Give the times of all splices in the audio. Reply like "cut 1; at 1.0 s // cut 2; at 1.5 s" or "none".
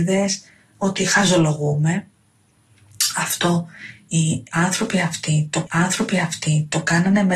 cut 1; at 5.7 s